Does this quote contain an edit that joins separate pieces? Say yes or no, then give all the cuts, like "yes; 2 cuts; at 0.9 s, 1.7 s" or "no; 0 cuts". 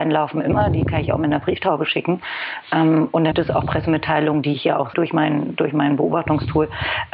yes; 2 cuts; at 3.3 s, 4.9 s